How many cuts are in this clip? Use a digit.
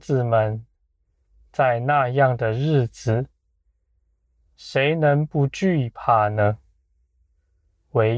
0